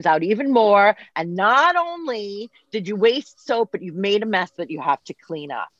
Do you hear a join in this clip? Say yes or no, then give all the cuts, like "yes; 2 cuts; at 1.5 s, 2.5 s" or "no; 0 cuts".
no; 0 cuts